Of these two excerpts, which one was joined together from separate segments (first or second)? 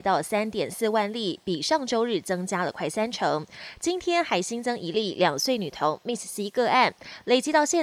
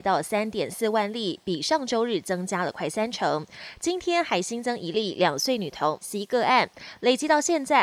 second